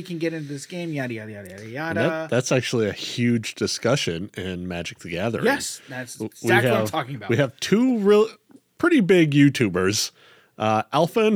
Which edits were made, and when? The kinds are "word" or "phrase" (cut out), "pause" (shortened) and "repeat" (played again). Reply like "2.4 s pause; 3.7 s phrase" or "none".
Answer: none